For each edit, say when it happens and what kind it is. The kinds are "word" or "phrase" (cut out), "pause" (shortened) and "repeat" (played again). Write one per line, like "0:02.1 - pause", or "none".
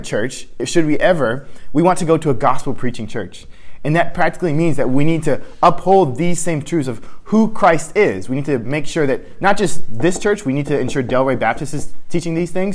none

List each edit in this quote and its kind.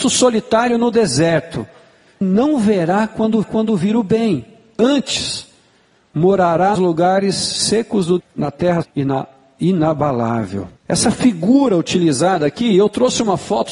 0:02.2 - word
0:03.4 - repeat
0:06.8 - word
0:08.2 - word
0:08.8 - word
0:10.8 - pause

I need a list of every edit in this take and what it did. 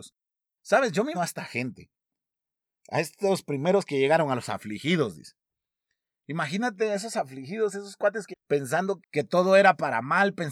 0:01.1 - word
0:08.3 - word
0:09.0 - word

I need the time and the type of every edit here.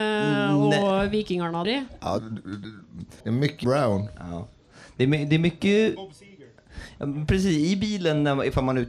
0:01.6 - phrase
0:02.2 - word
0:03.2 - pause
0:03.6 - word

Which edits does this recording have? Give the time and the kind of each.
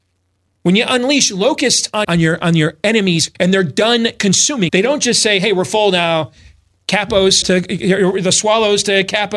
0:02.0 - word
0:03.3 - word
0:04.7 - word
0:07.4 - word

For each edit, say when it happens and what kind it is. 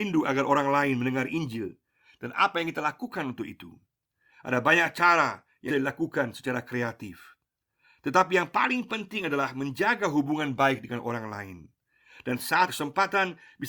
0:05.7 - word
0:12.7 - word

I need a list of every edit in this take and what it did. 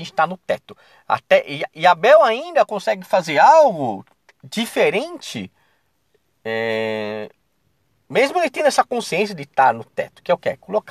none

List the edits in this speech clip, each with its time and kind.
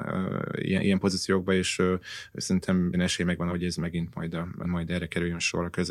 0:02.9 - word
0:03.5 - word
0:04.6 - word

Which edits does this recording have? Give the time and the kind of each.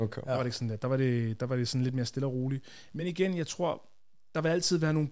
none

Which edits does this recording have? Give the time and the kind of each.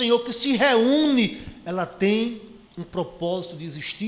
0:02.7 - pause

